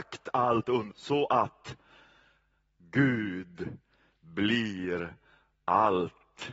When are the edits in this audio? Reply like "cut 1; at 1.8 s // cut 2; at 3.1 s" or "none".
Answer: cut 1; at 0.9 s